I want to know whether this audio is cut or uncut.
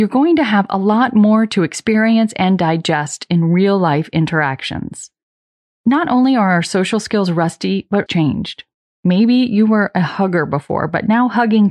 cut